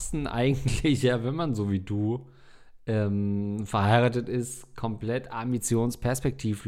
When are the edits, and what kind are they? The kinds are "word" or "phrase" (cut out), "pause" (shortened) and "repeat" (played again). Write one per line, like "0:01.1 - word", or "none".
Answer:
none